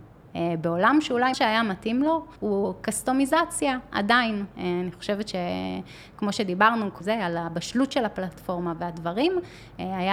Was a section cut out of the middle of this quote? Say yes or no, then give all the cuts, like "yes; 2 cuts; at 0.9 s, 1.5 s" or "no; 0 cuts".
yes; 3 cuts; at 1.3 s, 2.4 s, 7.0 s